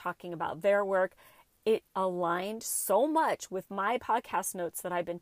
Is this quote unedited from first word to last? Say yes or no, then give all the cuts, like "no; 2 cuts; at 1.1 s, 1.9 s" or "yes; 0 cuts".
no; 1 cut; at 1.9 s